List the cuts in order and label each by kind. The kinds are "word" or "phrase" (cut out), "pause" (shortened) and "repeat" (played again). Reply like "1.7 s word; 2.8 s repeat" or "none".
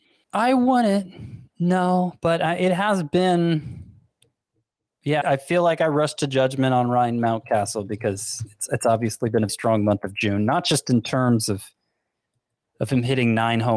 1.5 s pause; 5.2 s word; 9.5 s word